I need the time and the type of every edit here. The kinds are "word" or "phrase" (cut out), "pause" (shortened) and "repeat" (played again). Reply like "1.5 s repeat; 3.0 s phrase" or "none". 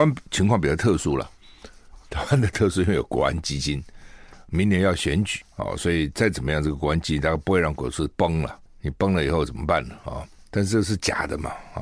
none